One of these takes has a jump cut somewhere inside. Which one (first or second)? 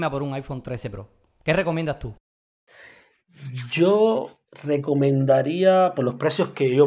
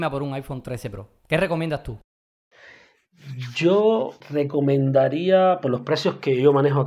second